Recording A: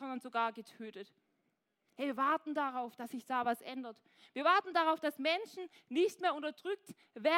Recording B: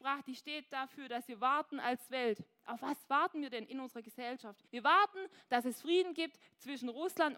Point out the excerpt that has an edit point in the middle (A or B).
B